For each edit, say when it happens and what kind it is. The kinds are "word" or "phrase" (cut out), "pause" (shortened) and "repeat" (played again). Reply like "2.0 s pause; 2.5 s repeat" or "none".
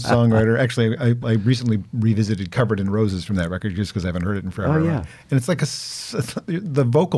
none

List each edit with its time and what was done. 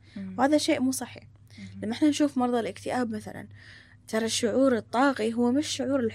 none

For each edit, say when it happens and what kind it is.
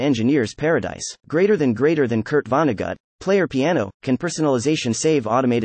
1.2 s pause

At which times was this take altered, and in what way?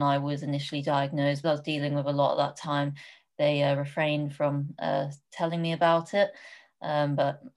1.4 s phrase

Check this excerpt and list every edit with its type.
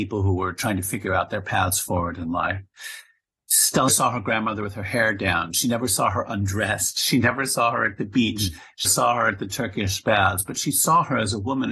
3.9 s word; 8.8 s word

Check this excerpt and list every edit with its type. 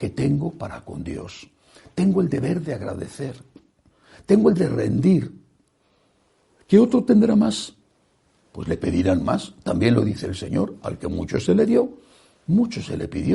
4.5 s word

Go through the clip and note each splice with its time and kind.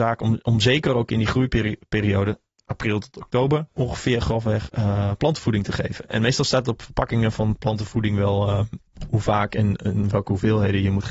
3.7 s pause

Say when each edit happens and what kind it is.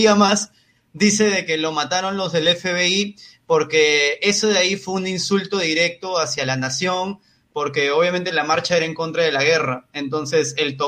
none

